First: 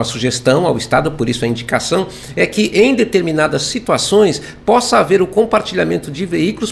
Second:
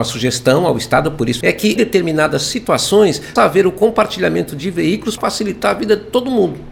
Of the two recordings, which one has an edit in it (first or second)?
second